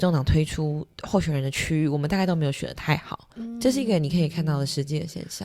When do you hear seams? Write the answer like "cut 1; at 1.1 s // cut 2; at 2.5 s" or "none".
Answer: cut 1; at 3.3 s

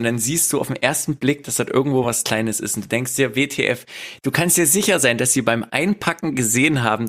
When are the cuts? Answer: none

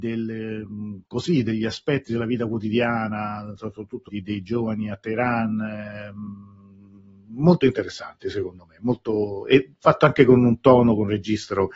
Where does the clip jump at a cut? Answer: cut 1; at 1.0 s // cut 2; at 4.1 s

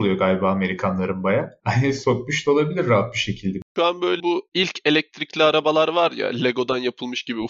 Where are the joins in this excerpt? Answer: cut 1; at 4.2 s

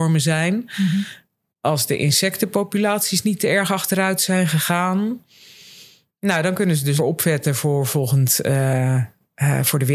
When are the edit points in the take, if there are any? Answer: cut 1; at 7.0 s

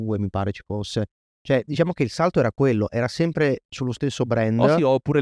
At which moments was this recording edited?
none

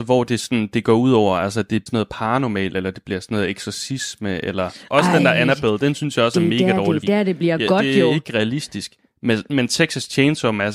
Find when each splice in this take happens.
cut 1; at 1.9 s // cut 2; at 7.0 s

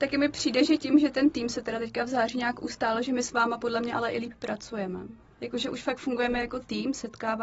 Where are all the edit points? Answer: none

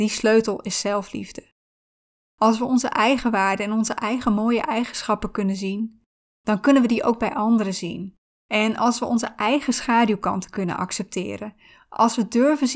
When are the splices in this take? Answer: cut 1; at 8.3 s

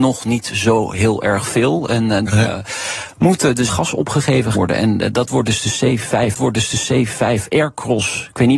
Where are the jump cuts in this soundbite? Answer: cut 1; at 2.3 s // cut 2; at 3.7 s // cut 3; at 4.5 s // cut 4; at 6.3 s

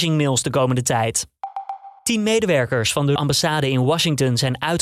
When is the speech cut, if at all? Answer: cut 1; at 2.0 s // cut 2; at 3.2 s

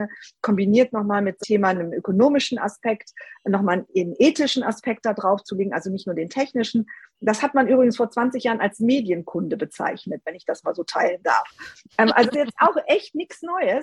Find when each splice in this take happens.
cut 1; at 1.4 s // cut 2; at 12.3 s

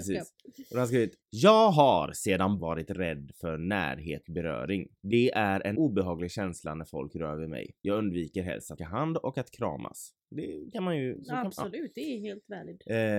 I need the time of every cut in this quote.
cut 1; at 1.2 s // cut 2; at 2.6 s // cut 3; at 4.2 s // cut 4; at 5.0 s // cut 5; at 5.7 s // cut 6; at 7.8 s // cut 7; at 8.8 s

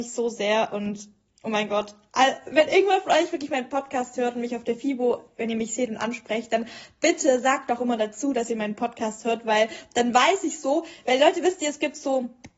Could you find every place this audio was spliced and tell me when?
none

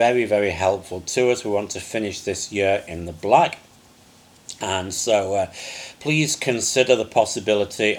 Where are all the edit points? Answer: none

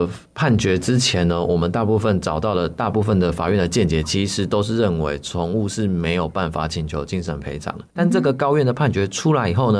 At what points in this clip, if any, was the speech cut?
cut 1; at 7.9 s

